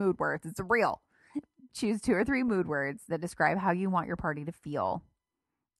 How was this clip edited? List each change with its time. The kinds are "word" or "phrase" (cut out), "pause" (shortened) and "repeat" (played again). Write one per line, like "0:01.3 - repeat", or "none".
none